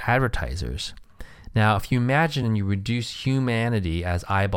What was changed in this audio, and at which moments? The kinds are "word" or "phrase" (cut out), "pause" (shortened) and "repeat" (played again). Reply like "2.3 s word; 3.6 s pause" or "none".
none